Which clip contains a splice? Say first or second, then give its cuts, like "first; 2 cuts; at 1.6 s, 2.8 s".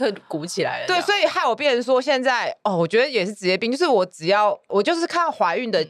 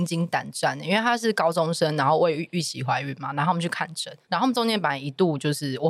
second; 1 cut; at 4.2 s